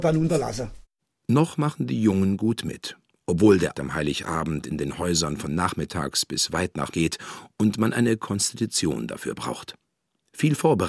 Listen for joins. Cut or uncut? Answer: cut